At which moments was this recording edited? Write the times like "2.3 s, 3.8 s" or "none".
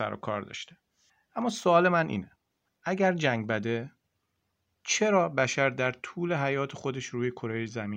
none

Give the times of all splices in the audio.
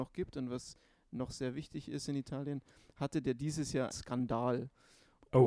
3.9 s

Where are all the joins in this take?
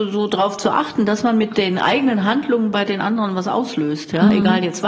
none

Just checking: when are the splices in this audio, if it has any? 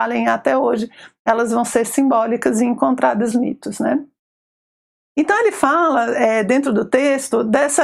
3.3 s

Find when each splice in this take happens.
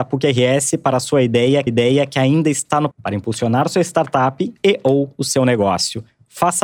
1.7 s, 2.9 s, 4.6 s

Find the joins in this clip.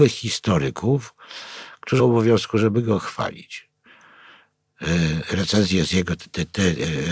2.0 s

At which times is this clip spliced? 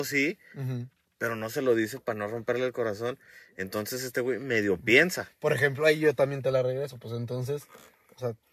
none

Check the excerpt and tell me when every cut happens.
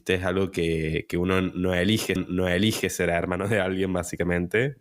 2.2 s

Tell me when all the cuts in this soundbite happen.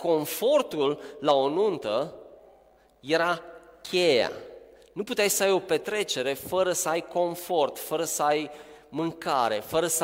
none

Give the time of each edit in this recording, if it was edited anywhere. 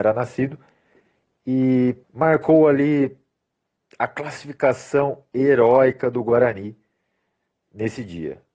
2.0 s

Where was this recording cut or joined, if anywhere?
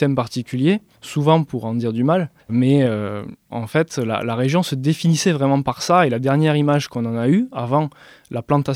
none

